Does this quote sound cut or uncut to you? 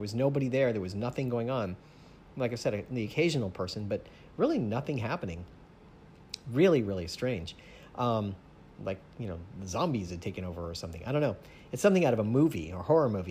uncut